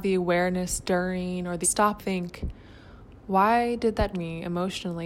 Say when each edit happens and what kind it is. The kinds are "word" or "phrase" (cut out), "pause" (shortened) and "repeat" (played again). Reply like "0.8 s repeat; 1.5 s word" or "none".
1.6 s phrase; 2.0 s word; 4.1 s word